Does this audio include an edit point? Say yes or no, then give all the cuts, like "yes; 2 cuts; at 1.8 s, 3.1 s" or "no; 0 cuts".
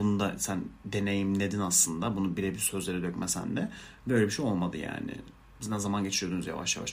no; 0 cuts